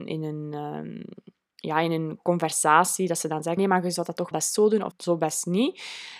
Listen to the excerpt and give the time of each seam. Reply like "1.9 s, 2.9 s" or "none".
3.6 s, 4.3 s, 4.9 s

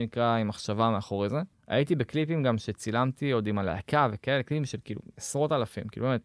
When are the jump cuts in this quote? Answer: 1.5 s

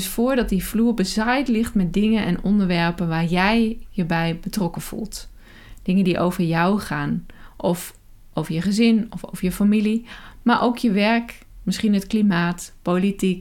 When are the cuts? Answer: none

